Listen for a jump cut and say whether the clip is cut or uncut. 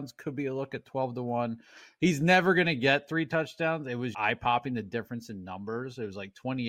cut